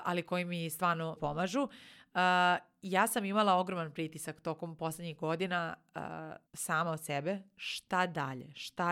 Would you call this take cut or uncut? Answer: cut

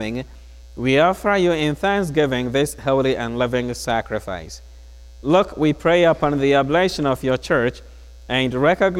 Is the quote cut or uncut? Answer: uncut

